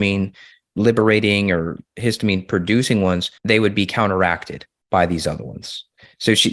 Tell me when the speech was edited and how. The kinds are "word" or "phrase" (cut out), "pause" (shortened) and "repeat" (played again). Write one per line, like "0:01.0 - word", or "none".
0:03.4 - pause